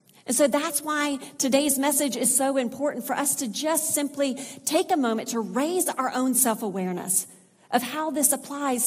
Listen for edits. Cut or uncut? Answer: uncut